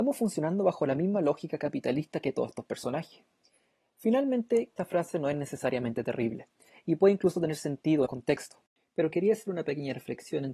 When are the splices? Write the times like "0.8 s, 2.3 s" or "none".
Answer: 4.8 s, 8.1 s